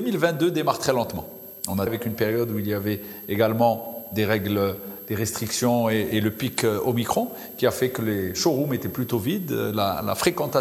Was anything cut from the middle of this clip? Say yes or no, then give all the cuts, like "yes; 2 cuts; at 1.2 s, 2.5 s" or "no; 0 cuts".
yes; 1 cut; at 1.9 s